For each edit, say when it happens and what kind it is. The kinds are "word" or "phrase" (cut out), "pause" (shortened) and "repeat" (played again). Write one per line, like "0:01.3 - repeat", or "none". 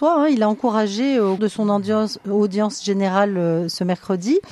0:01.4 - word